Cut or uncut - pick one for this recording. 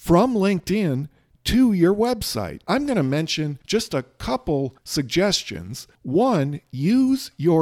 uncut